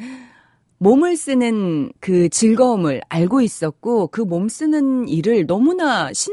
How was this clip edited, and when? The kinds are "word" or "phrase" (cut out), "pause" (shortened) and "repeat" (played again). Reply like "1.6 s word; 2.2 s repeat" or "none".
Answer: 2.0 s pause

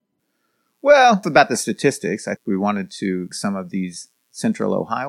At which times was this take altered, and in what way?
1.2 s word; 2.4 s word; 3.3 s word

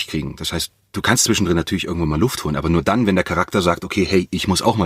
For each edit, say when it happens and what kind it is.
none

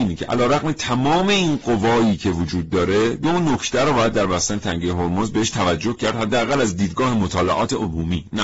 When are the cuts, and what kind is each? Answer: none

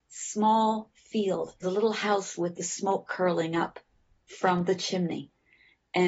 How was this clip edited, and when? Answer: 1.6 s phrase; 4.1 s pause

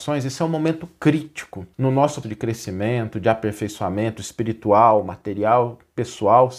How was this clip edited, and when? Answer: 1.7 s pause; 2.2 s word; 3.2 s phrase

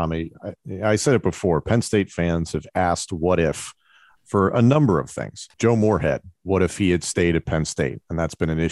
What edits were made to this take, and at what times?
5.5 s pause

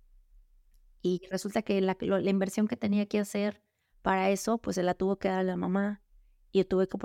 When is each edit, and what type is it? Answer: none

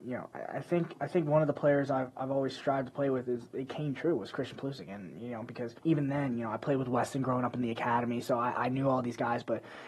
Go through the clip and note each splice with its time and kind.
5.8 s pause

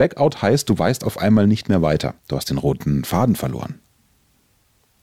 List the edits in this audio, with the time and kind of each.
2.2 s pause

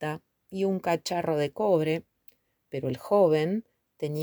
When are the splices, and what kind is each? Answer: none

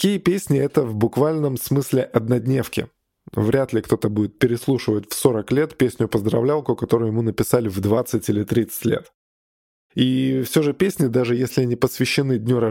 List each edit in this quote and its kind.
none

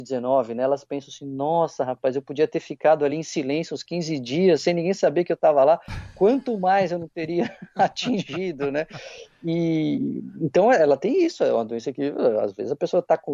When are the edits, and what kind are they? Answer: none

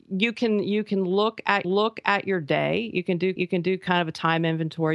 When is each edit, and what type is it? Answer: 1.6 s repeat; 3.4 s repeat

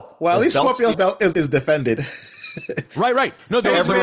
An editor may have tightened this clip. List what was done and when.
0.9 s word; 1.3 s phrase

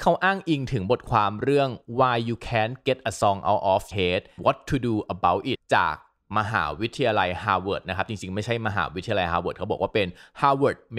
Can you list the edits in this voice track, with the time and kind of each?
3.9 s word; 4.4 s word; 5.5 s word

